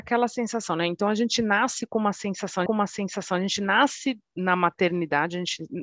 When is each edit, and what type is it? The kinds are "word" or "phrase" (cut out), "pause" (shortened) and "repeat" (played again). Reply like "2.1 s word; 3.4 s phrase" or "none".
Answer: 2.7 s repeat

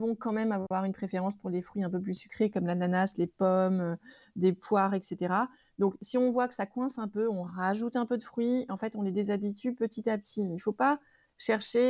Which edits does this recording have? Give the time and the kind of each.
none

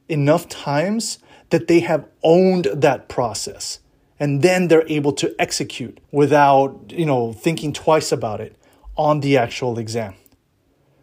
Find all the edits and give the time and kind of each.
6.0 s pause

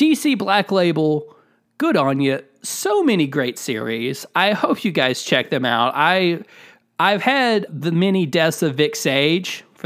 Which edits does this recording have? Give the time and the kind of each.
7.7 s word

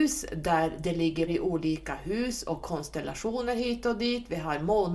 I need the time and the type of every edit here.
1.3 s word

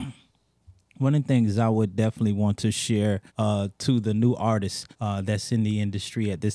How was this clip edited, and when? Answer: 3.3 s pause; 4.9 s pause

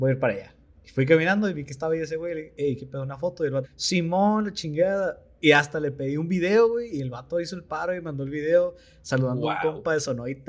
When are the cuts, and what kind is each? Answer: 3.6 s word

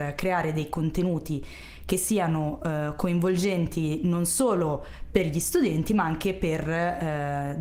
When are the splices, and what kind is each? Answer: none

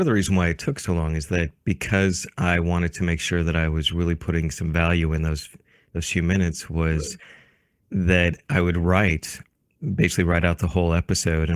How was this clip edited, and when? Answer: none

